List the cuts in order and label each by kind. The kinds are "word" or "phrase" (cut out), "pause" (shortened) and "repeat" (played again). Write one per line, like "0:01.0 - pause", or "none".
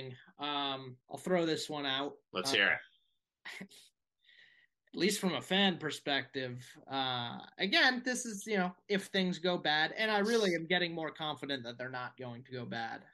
0:01.0 - pause
0:02.2 - pause